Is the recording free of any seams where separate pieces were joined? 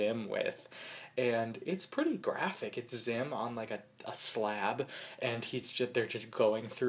yes; 0 cuts

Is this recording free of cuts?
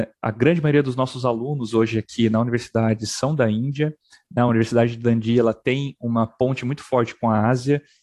yes; 0 cuts

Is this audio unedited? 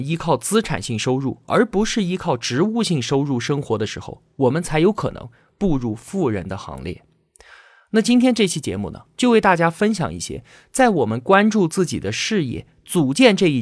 yes; 0 cuts

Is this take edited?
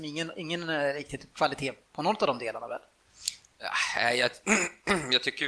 no; 0 cuts

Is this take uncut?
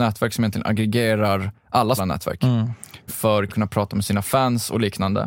no; 3 cuts; at 2.0 s, 3.1 s, 3.5 s

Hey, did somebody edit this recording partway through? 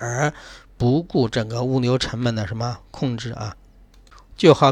no; 0 cuts

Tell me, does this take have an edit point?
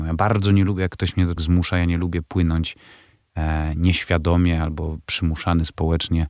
yes; 1 cut; at 1.4 s

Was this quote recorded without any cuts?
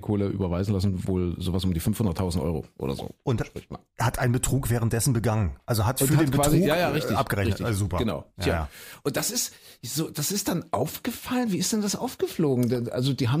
yes; 0 cuts

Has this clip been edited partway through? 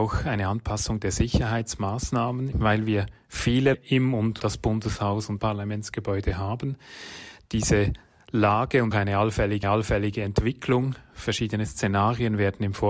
yes; 6 cuts; at 2.5 s, 3.7 s, 4.4 s, 5.4 s, 8.9 s, 9.6 s

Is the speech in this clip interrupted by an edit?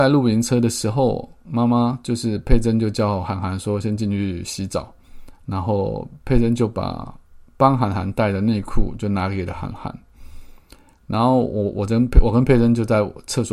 no; 0 cuts

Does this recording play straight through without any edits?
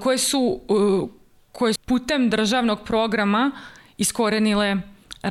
no; 1 cut; at 1.8 s

